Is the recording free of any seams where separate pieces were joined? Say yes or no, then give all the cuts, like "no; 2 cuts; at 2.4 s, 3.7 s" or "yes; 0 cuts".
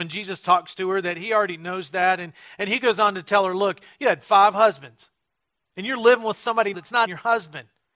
no; 2 cuts; at 6.7 s, 7.1 s